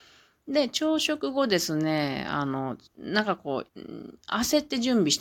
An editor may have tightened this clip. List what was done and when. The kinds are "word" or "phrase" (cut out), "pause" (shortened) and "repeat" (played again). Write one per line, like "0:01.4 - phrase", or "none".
0:02.9 - pause
0:03.7 - pause